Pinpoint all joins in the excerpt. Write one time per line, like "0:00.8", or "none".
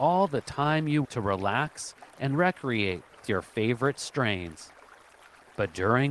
0:01.0
0:03.2

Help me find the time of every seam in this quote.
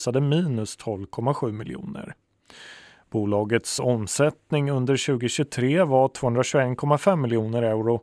none

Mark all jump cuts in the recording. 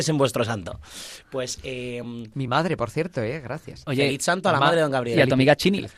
none

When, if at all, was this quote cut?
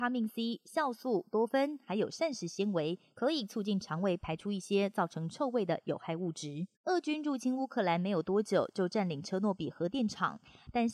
0:06.7

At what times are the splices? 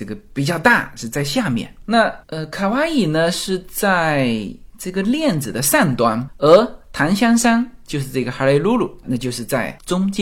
0:02.2
0:09.0

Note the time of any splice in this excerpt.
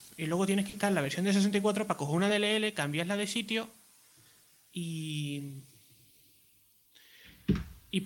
none

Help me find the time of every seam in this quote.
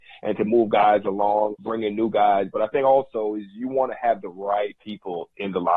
0:01.5
0:04.8

